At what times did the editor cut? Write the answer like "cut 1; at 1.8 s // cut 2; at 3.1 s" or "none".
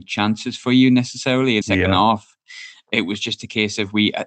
cut 1; at 1.6 s